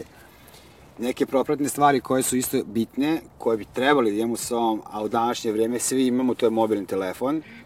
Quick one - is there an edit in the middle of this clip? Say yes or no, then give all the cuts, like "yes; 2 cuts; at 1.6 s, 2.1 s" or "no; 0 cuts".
no; 0 cuts